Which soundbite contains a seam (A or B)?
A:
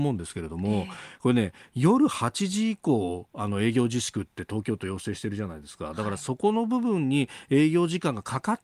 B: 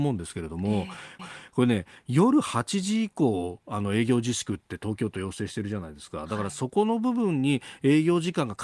B